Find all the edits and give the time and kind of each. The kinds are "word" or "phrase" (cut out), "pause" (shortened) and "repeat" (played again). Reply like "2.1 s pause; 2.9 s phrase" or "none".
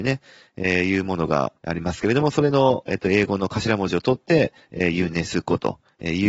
1.6 s pause